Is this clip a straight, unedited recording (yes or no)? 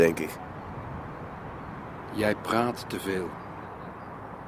yes